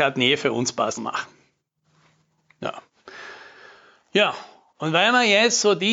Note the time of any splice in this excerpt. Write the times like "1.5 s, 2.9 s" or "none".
1.0 s